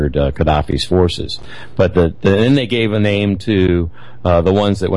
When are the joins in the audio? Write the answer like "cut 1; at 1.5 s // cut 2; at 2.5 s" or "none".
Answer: none